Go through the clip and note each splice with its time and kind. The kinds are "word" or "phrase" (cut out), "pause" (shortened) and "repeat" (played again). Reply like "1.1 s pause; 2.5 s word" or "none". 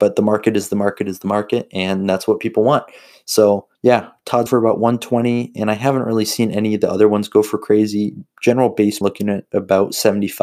3.7 s pause; 4.5 s word; 9.0 s phrase